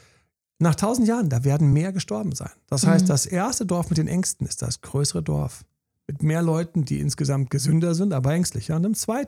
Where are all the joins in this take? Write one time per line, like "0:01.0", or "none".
none